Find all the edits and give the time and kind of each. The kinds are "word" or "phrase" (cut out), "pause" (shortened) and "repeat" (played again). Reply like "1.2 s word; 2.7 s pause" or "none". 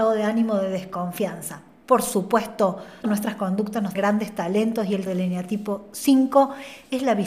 3.0 s word; 3.9 s word; 5.1 s word